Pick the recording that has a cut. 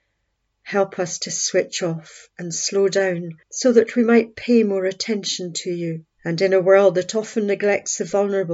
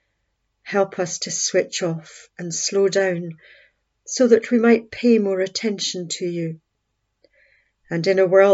first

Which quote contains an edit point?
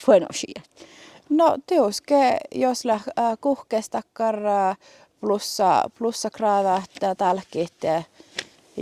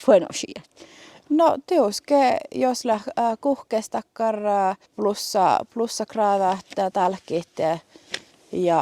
second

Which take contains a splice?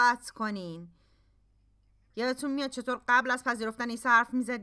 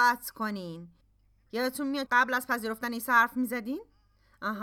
second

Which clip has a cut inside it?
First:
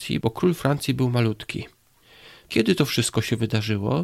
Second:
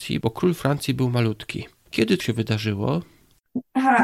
second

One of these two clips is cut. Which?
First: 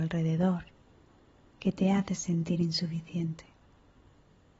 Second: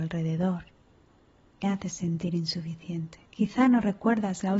second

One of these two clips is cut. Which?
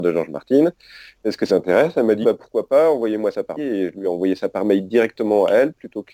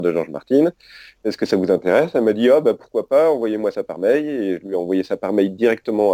first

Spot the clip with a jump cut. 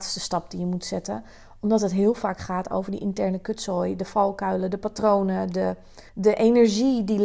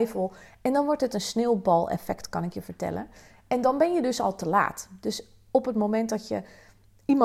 first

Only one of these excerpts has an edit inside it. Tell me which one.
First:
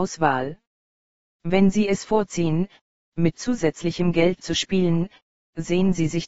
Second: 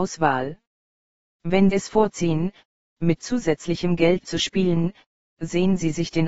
second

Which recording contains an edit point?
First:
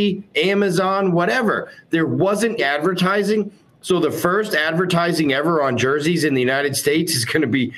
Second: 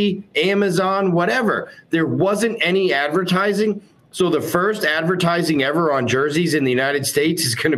first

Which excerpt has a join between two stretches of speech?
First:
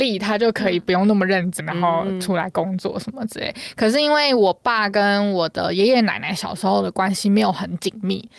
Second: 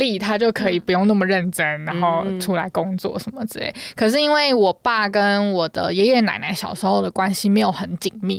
first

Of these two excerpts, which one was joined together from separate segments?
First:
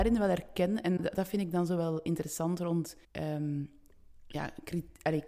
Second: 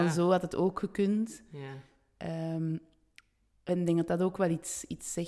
first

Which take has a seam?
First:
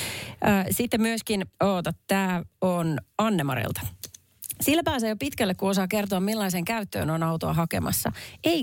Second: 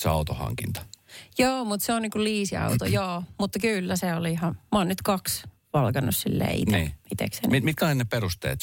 first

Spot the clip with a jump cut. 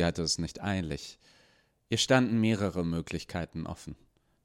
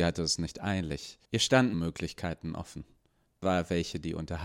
second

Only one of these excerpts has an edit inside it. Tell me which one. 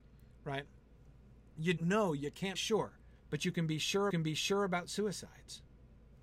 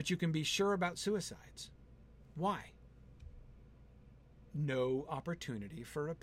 first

